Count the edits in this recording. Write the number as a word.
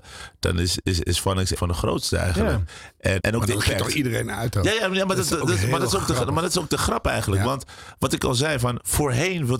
three